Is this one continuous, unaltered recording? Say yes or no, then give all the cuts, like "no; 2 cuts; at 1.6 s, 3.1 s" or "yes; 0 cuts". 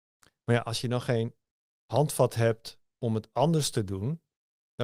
yes; 0 cuts